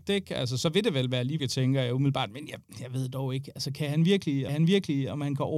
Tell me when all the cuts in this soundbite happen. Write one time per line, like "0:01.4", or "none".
0:01.4
0:04.5